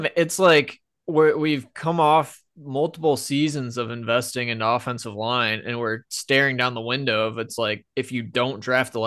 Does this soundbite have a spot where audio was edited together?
no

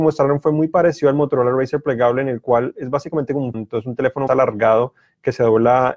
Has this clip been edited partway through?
yes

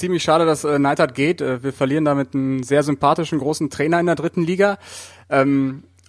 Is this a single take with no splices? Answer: yes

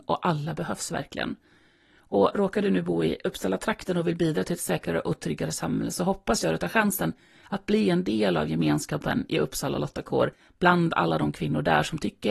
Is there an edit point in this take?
no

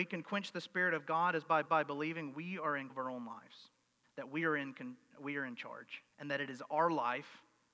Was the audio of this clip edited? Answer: yes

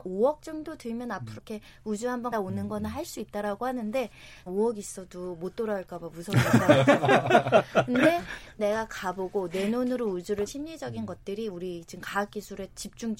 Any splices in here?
yes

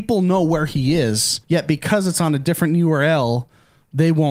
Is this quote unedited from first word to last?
no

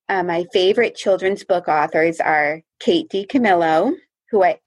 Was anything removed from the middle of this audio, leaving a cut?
yes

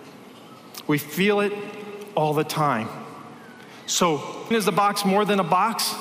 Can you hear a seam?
yes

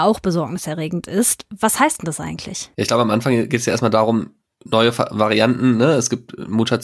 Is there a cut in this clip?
no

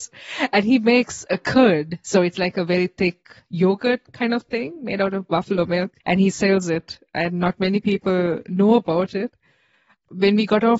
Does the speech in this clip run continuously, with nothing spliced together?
no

